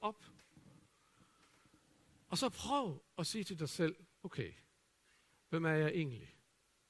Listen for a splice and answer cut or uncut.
uncut